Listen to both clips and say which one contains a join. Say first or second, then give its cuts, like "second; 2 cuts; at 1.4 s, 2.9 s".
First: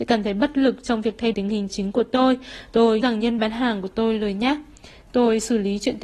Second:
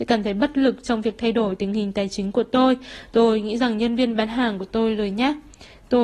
first; 4 cuts; at 1.3 s, 1.7 s, 3.0 s, 3.4 s